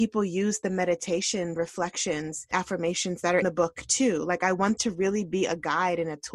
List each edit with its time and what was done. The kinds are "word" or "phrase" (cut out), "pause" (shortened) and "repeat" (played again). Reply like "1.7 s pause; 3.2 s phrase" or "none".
1.6 s word; 3.4 s word; 4.8 s word